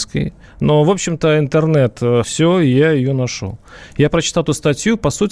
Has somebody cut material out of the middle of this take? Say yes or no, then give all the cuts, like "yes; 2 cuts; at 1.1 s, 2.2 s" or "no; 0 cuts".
yes; 1 cut; at 2.2 s